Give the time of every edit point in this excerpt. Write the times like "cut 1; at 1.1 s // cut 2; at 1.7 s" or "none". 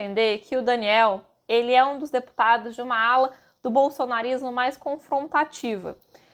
none